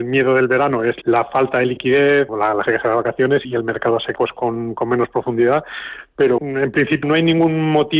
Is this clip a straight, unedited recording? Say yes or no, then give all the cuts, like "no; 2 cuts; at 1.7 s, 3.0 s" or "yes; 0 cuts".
no; 7 cuts; at 1.0 s, 2.3 s, 2.7 s, 3.4 s, 4.2 s, 6.4 s, 7.0 s